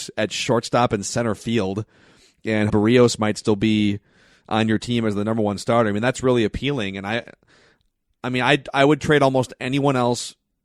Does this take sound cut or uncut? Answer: cut